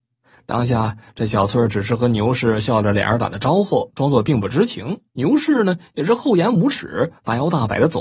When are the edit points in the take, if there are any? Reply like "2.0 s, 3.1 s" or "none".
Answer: 5.1 s